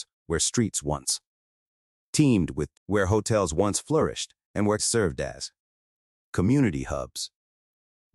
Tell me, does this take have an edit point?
yes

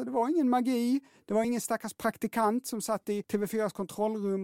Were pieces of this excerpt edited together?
no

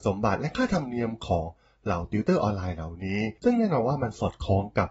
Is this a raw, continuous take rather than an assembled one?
yes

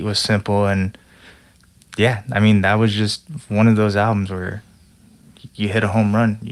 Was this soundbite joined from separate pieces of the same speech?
no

